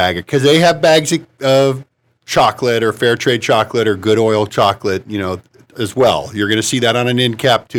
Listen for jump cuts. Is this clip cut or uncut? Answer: uncut